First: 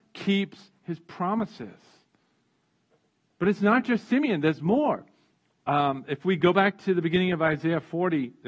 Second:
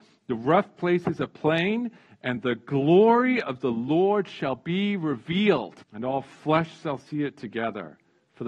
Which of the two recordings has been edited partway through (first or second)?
second